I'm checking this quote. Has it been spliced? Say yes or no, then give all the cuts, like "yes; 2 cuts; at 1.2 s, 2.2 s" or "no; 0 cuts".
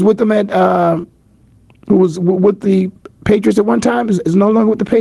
no; 0 cuts